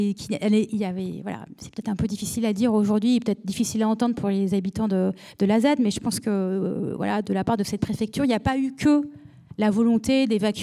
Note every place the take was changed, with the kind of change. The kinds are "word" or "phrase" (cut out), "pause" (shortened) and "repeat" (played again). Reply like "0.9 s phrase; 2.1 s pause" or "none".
none